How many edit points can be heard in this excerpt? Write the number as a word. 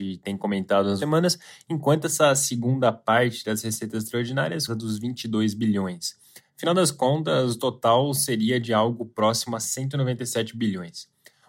two